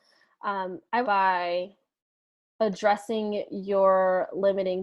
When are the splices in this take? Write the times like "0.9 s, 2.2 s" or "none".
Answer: 1.0 s